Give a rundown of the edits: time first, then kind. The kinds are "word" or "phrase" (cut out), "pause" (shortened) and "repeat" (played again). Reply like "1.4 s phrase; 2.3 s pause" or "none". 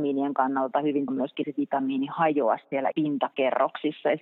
1.1 s word; 1.4 s phrase; 2.9 s word